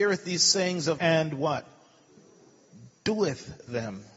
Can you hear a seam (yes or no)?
yes